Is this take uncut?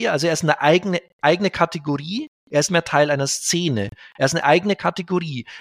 no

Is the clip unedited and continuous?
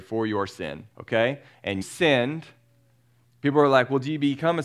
no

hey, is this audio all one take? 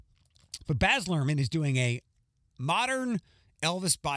yes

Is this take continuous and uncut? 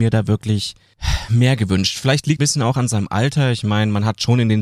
no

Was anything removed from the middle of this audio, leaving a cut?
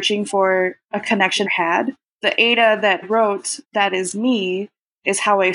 yes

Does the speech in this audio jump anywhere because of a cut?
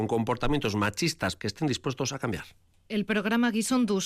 yes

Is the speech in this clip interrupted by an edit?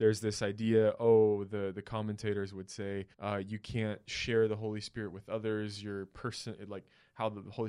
yes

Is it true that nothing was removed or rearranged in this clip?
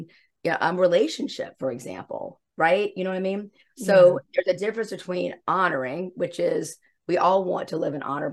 yes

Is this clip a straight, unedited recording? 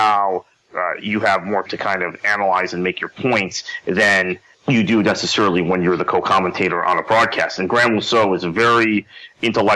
no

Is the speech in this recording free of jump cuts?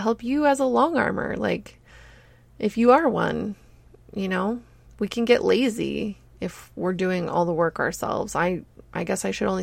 yes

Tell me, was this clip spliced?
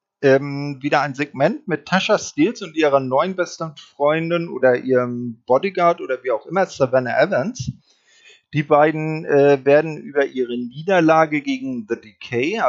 no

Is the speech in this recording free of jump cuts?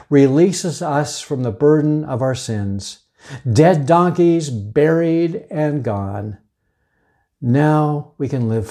yes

